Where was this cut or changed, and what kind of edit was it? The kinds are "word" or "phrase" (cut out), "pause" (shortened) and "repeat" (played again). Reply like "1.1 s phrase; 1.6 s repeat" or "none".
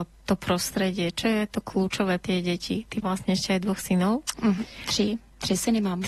2.2 s word; 3.0 s word